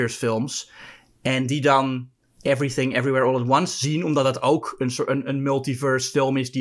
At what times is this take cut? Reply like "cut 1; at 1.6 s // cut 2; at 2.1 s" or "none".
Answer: none